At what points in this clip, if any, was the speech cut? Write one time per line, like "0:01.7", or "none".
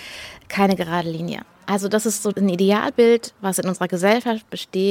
0:02.3